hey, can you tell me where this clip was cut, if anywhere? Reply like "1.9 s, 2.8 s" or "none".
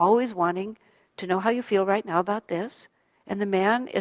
none